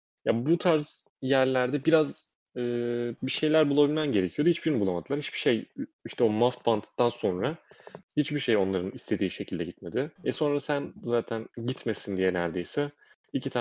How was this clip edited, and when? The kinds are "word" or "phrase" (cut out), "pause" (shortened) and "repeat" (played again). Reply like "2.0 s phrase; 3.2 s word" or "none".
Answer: 1.1 s pause; 2.4 s pause; 5.9 s pause; 8.1 s pause; 10.2 s pause; 11.5 s pause